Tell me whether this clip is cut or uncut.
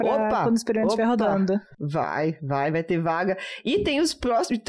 uncut